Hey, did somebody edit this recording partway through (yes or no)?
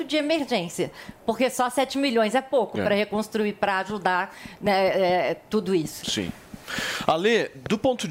no